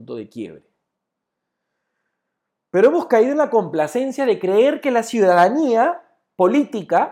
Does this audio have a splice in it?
no; 0 cuts

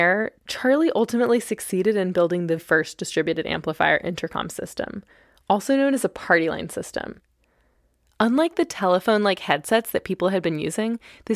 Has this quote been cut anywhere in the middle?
yes; 1 cut; at 2.6 s

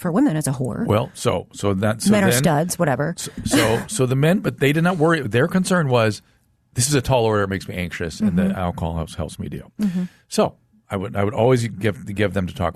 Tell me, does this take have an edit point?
no; 0 cuts

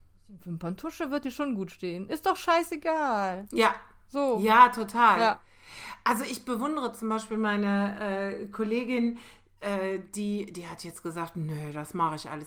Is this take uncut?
yes; 0 cuts

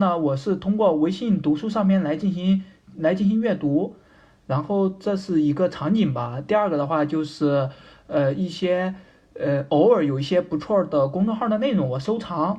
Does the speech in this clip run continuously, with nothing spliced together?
yes; 0 cuts

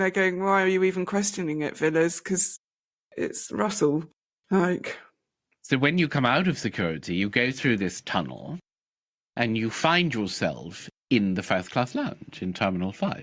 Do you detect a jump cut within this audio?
no; 0 cuts

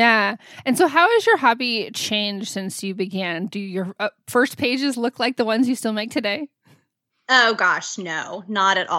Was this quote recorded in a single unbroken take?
yes; 0 cuts

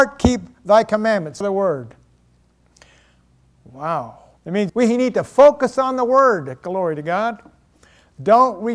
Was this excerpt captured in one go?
no; 3 cuts; at 1.4 s, 4.4 s, 4.7 s

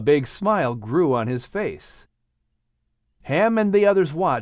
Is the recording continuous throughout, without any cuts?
yes; 0 cuts

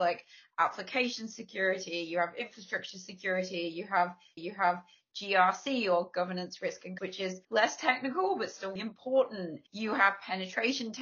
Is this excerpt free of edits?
no; 5 cuts; at 4.4 s, 7.0 s, 7.4 s, 8.8 s, 9.7 s

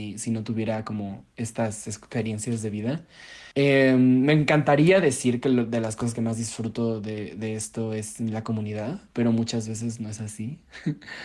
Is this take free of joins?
no; 1 cut; at 3.5 s

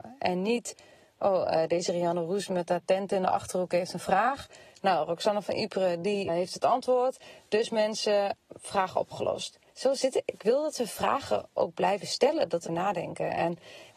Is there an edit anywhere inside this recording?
yes; 3 cuts; at 6.3 s, 9.7 s, 12.7 s

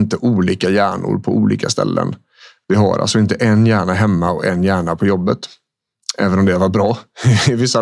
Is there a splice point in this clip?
no; 0 cuts

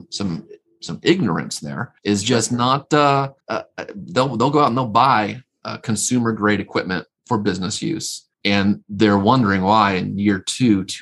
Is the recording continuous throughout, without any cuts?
no; 4 cuts; at 2.0 s, 3.4 s, 7.2 s, 8.3 s

